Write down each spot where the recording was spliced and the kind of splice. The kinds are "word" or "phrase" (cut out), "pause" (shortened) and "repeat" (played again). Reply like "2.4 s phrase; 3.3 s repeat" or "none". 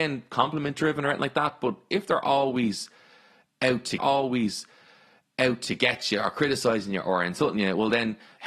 4.0 s repeat